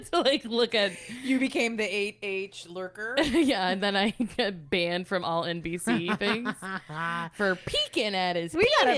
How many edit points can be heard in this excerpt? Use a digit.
0